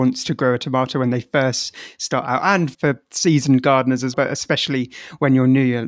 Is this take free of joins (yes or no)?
no